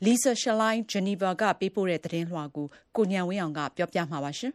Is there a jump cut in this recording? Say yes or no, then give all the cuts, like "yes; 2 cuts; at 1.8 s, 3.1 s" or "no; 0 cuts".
no; 0 cuts